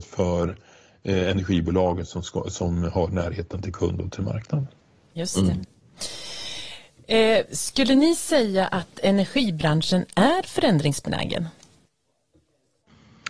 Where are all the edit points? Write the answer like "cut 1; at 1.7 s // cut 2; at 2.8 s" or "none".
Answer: none